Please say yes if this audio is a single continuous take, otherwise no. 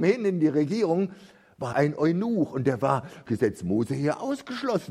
no